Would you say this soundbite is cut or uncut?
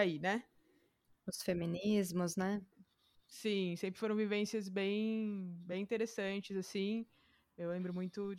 uncut